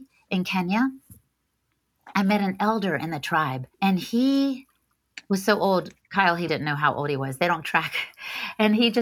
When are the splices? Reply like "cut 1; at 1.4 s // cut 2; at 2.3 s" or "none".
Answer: cut 1; at 3.7 s // cut 2; at 6.5 s // cut 3; at 7.6 s